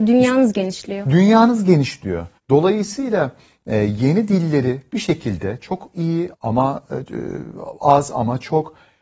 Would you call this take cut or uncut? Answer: cut